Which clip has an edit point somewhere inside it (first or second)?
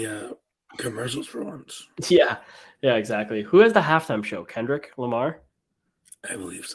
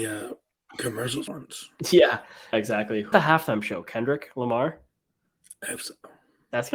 second